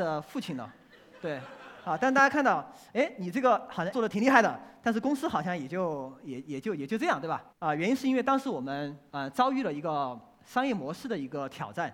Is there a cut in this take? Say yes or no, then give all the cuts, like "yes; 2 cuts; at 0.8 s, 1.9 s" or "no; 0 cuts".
yes; 2 cuts; at 3.9 s, 7.5 s